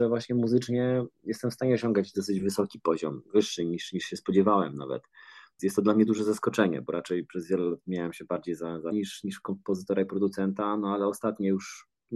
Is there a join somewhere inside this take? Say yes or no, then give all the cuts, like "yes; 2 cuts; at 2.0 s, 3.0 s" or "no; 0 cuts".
yes; 1 cut; at 8.9 s